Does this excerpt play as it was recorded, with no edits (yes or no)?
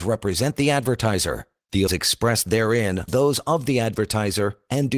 no